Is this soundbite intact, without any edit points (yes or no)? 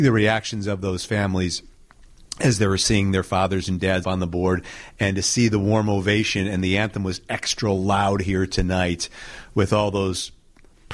no